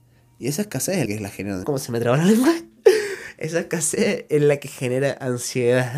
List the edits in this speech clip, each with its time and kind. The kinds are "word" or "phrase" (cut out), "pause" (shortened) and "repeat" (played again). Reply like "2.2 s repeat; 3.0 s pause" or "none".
1.1 s word; 1.6 s phrase